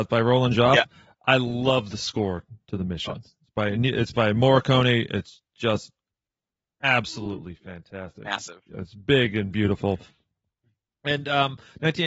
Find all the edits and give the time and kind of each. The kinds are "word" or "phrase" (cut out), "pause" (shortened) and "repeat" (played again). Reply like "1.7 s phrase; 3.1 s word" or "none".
none